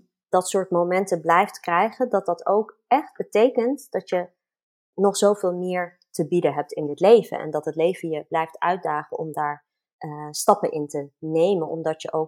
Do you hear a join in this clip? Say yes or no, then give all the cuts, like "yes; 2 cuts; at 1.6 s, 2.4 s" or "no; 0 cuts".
no; 0 cuts